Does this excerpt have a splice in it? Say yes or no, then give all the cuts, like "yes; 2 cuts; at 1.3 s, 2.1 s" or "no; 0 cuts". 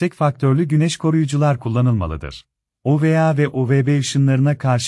yes; 1 cut; at 2.7 s